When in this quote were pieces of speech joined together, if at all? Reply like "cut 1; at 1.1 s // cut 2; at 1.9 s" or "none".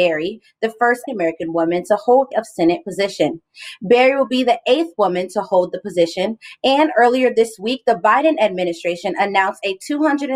cut 1; at 1.1 s // cut 2; at 2.3 s